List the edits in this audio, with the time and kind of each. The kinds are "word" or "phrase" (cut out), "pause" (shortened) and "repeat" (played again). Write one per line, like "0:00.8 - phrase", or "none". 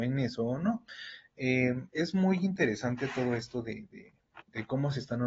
none